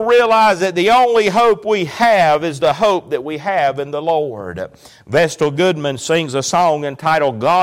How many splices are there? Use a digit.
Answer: 0